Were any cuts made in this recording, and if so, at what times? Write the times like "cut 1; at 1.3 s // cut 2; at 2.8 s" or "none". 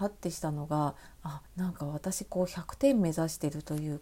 cut 1; at 1.5 s